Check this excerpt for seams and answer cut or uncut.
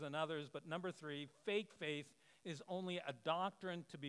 uncut